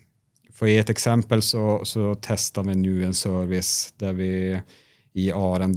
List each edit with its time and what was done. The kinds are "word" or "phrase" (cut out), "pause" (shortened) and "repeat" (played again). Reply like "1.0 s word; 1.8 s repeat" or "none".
none